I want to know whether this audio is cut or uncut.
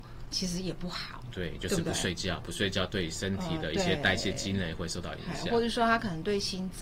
uncut